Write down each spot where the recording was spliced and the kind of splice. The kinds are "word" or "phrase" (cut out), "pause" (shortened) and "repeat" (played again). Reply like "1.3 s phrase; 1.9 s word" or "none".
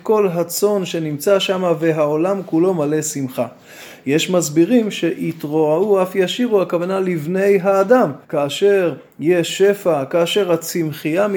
8.2 s pause